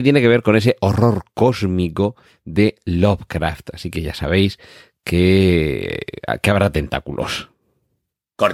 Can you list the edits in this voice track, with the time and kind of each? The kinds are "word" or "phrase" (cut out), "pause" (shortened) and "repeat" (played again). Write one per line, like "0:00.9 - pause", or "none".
none